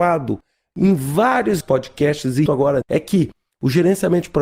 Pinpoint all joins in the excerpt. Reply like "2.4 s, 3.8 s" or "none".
1.6 s, 2.5 s, 2.8 s